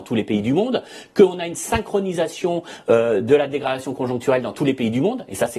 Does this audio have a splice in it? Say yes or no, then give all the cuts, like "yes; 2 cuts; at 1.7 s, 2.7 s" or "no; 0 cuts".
no; 0 cuts